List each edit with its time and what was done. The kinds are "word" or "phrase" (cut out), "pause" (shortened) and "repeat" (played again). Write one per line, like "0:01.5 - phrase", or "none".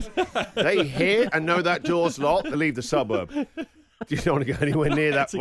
0:02.5 - phrase